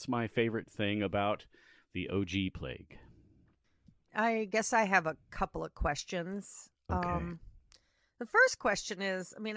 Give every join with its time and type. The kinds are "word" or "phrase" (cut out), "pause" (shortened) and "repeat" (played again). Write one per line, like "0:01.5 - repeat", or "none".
none

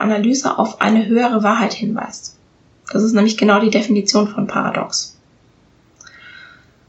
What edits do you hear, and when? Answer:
none

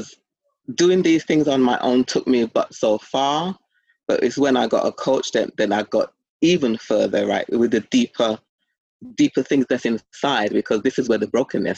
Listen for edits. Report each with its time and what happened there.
none

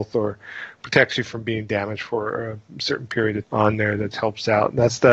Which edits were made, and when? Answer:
0:03.4 - word
0:04.1 - word

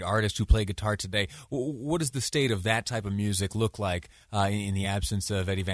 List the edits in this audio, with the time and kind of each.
none

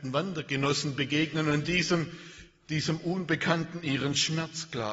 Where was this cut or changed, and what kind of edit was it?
none

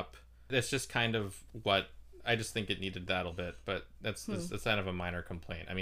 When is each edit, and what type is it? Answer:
0:03.3 - word

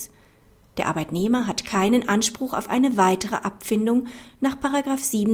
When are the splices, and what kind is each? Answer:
none

